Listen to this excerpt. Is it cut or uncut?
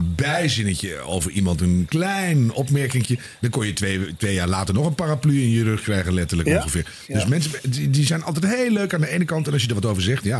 uncut